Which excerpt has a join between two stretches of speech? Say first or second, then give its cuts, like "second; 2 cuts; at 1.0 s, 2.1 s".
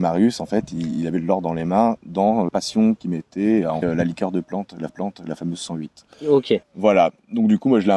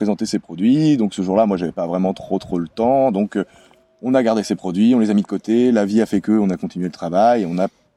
first; 4 cuts; at 2.5 s, 3.8 s, 4.9 s, 6.6 s